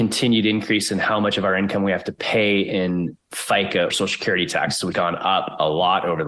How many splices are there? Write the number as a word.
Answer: two